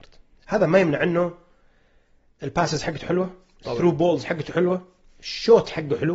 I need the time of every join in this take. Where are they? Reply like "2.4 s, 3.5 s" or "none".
none